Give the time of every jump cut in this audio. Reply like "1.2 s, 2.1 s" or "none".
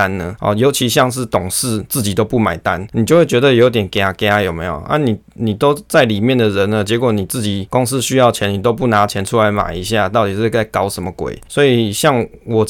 none